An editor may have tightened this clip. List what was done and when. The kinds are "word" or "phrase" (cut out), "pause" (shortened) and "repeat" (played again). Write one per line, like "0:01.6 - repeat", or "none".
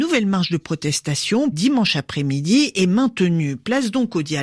0:01.5 - word